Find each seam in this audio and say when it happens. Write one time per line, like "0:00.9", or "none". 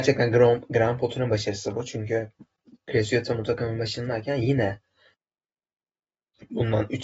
none

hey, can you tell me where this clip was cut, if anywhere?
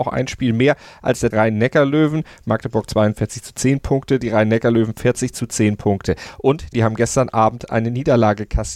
0:01.3
0:06.7

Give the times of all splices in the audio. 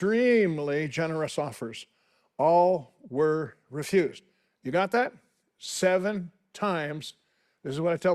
none

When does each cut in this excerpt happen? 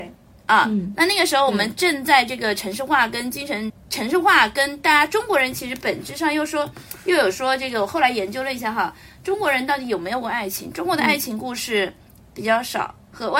0:03.7

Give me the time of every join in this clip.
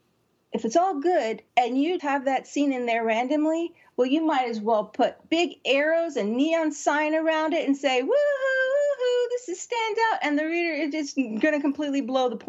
0:01.5
0:02.0

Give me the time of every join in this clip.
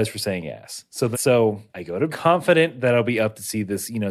0:01.1
0:01.7
0:02.1

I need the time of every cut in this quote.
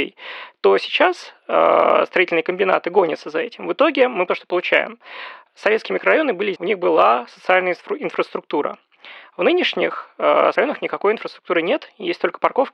0:04.3
0:06.6
0:10.5

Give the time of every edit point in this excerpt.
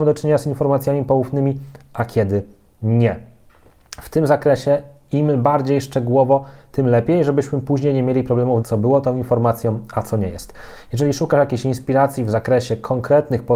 0:08.6

